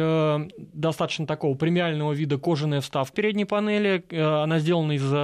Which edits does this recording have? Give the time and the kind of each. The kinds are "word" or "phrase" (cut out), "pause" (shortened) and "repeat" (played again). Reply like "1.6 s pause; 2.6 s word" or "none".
3.1 s word

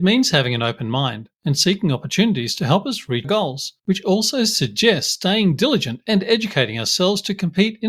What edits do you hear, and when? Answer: 1.3 s pause; 3.2 s word; 3.8 s pause

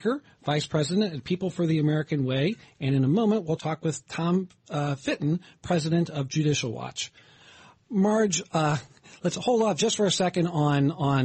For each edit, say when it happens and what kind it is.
none

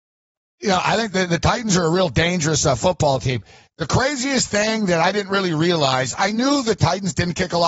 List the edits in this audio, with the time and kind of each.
none

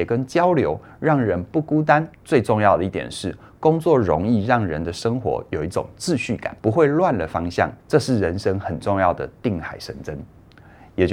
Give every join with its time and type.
2.1 s pause; 6.6 s pause; 7.8 s pause

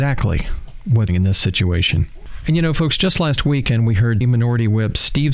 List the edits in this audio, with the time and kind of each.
1.1 s phrase; 4.2 s word

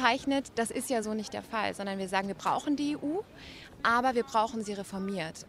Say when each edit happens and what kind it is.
none

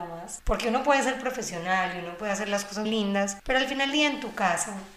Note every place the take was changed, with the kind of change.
2.8 s word; 3.9 s word

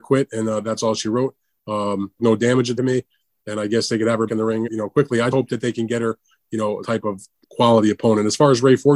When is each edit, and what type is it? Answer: 2.2 s word; 2.8 s word; 4.3 s word; 4.7 s word; 5.3 s word; 6.8 s word; 7.4 s word

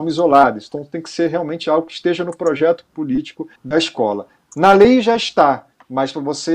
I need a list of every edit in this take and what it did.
3.6 s pause

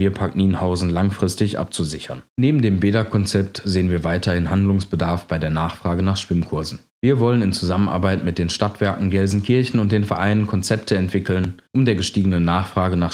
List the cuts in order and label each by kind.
2.3 s pause; 6.9 s pause; 11.7 s pause

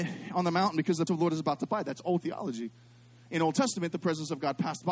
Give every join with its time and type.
1.1 s word; 1.7 s word; 2.2 s word

